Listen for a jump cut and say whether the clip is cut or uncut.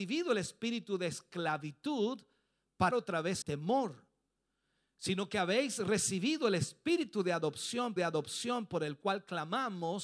cut